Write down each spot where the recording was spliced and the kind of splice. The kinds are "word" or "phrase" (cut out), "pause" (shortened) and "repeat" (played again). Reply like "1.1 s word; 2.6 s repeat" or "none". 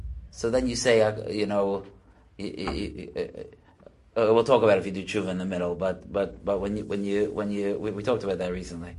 none